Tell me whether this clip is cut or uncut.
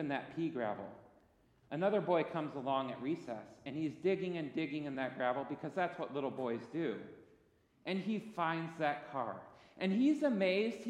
uncut